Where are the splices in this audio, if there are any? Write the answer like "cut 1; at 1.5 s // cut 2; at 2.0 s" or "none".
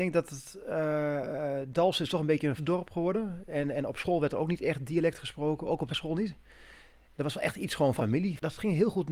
cut 1; at 2.6 s // cut 2; at 5.9 s // cut 3; at 8.0 s